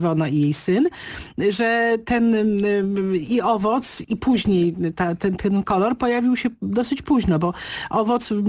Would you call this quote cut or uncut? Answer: cut